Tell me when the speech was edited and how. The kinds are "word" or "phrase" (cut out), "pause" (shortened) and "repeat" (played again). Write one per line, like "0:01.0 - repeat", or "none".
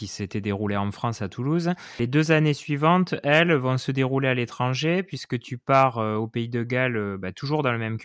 none